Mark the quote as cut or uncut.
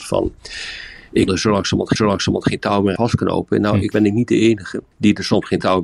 cut